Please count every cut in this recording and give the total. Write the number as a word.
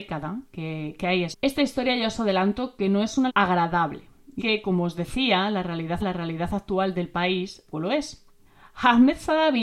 six